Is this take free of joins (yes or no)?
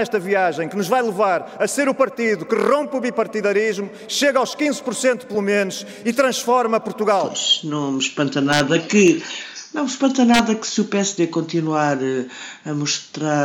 yes